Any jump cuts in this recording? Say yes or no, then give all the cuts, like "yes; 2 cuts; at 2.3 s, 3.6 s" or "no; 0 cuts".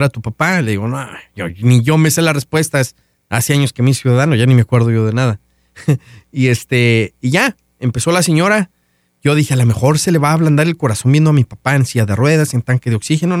yes; 1 cut; at 3.0 s